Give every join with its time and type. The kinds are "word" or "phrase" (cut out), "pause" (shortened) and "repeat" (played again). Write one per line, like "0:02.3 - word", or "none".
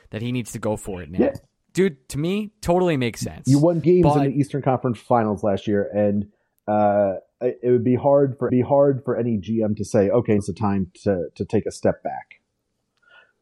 0:03.8 - word
0:08.5 - repeat
0:10.4 - word